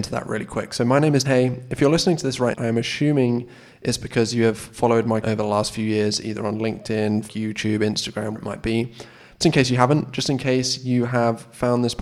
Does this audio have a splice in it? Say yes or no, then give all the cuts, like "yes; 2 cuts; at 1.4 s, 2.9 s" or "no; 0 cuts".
yes; 6 cuts; at 1.2 s, 2.5 s, 5.2 s, 7.3 s, 8.4 s, 9.4 s